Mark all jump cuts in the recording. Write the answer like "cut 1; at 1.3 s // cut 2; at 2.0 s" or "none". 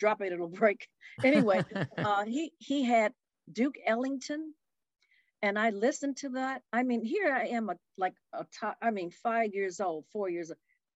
none